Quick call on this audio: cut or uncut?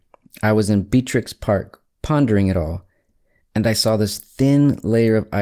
uncut